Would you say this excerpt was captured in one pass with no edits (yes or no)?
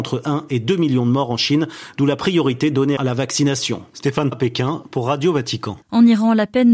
no